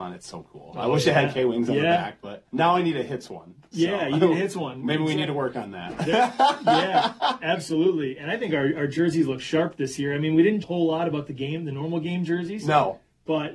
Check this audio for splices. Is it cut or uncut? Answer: cut